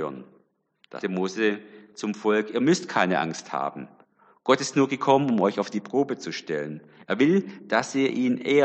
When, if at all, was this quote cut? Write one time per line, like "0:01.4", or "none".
0:01.0